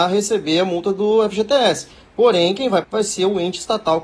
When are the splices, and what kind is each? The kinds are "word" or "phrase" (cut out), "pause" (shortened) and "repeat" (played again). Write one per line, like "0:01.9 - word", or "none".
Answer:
0:02.8 - word